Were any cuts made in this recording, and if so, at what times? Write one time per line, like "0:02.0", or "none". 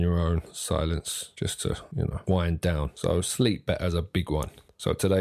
none

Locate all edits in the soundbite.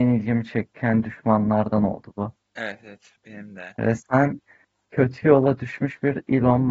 0:03.2

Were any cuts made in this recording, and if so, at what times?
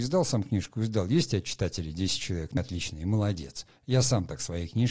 0:02.6

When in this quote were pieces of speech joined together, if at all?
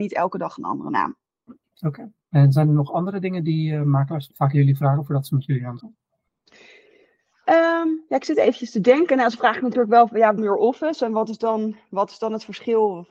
0:01.2
0:02.2
0:04.3
0:05.8
0:10.4

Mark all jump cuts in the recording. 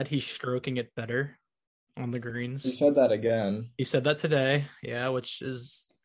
none

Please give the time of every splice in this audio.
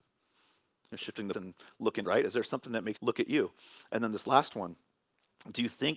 0:01.3
0:02.0
0:03.0

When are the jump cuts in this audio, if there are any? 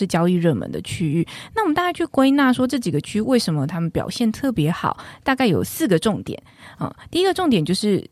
none

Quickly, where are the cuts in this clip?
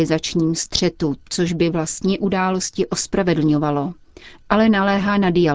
none

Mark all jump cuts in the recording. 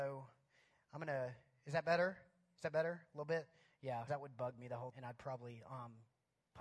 0:04.1
0:04.9

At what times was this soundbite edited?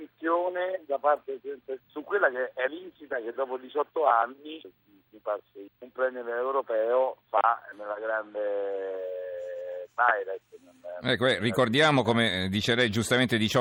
0:01.8
0:02.7
0:04.6
0:05.7
0:07.7

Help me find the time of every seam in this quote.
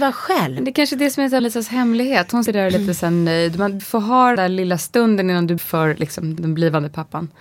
0:01.4
0:02.5
0:03.8
0:04.4
0:05.6
0:06.4

